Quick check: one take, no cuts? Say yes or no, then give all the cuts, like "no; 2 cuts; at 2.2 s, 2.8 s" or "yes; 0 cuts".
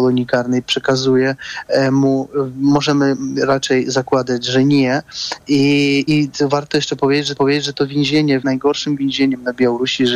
no; 3 cuts; at 6.1 s, 7.4 s, 8.4 s